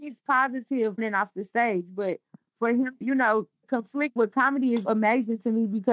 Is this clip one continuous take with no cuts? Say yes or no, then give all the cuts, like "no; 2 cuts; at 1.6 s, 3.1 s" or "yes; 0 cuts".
no; 4 cuts; at 1.0 s, 3.0 s, 4.2 s, 4.8 s